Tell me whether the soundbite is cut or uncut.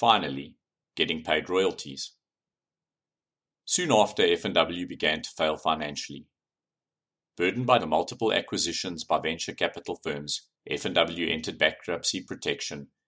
cut